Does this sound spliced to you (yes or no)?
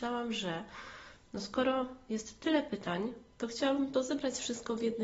yes